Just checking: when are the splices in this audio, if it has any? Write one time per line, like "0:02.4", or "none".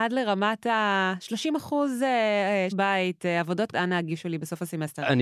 0:02.7
0:03.7